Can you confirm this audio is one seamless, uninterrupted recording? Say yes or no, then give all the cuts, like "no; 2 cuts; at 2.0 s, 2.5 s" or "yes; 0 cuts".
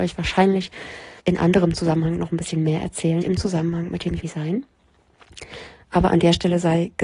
no; 3 cuts; at 1.2 s, 3.2 s, 4.2 s